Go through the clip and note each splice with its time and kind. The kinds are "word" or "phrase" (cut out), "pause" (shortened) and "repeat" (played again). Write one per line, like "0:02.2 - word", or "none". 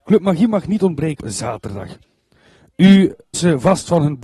0:01.2 - word
0:03.3 - word

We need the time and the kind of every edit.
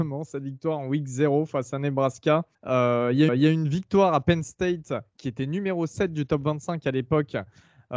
0:02.5 - pause
0:03.3 - repeat

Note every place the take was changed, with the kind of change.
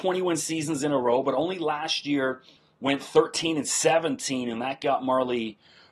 none

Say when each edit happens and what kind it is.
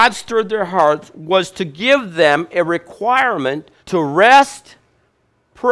0:03.8 - pause

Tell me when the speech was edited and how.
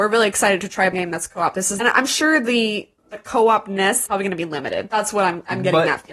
0:00.9 - word
0:01.8 - phrase
0:03.0 - pause
0:04.1 - word

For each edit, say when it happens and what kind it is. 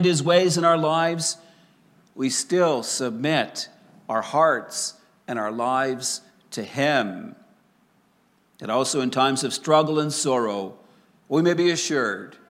none

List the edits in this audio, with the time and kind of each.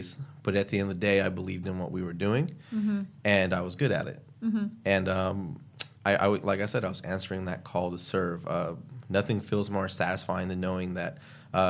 0:06.0 - pause

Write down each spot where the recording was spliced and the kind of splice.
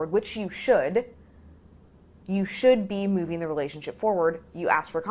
none

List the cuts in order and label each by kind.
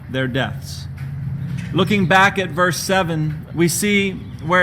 0:03.5 - word

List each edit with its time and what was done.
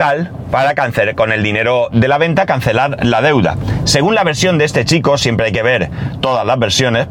none

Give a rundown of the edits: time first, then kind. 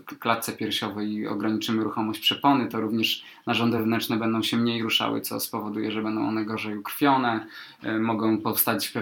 none

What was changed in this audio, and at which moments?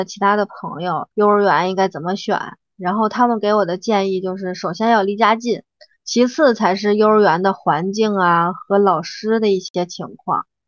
0:01.1 - pause
0:05.9 - phrase

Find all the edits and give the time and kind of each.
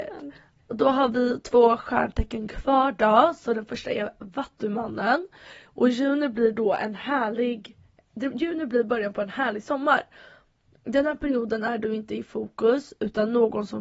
none

